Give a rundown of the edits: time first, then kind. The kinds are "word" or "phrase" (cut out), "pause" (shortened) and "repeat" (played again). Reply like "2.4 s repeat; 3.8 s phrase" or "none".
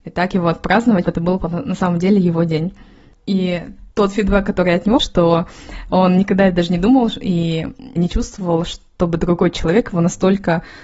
1.0 s word; 3.9 s pause; 5.0 s word; 8.0 s word